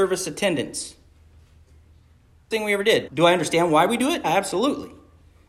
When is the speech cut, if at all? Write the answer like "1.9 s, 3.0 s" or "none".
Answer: 2.5 s, 3.1 s, 4.2 s